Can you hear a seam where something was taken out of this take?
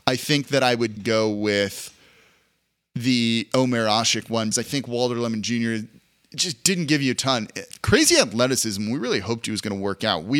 yes; 2 cuts; at 1.0 s, 4.5 s

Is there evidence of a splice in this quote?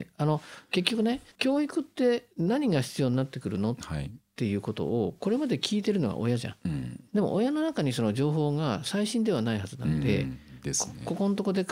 yes; 3 cuts; at 1.3 s, 2.3 s, 7.1 s

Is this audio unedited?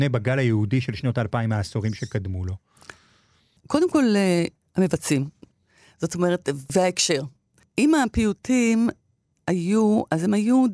yes; 0 cuts

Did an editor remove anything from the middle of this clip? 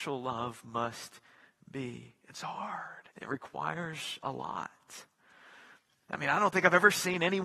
yes; 1 cut; at 3.1 s

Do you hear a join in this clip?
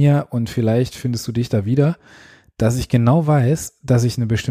no; 0 cuts

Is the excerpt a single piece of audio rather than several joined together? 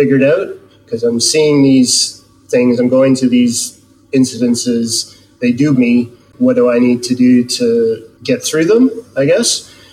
no; 2 cuts; at 5.7 s, 6.3 s

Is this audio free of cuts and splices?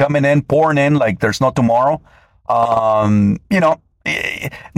yes; 0 cuts

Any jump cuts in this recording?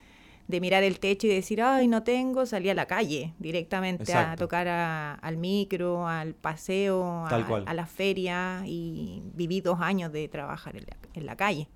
no; 0 cuts

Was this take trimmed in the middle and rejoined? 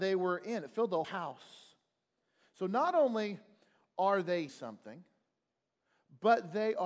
yes; 2 cuts; at 1.0 s, 4.5 s

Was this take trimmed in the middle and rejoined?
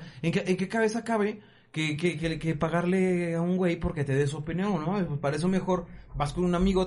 no; 0 cuts

